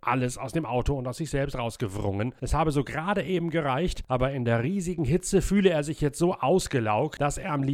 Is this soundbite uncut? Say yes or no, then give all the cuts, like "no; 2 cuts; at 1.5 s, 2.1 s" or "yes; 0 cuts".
yes; 0 cuts